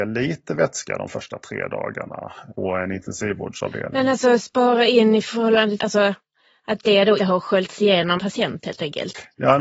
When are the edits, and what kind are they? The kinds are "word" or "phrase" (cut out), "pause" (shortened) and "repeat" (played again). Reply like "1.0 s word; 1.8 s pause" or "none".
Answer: 2.5 s word; 5.8 s word; 7.2 s word; 8.2 s word